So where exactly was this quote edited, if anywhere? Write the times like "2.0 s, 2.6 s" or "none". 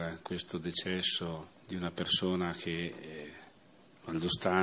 1.6 s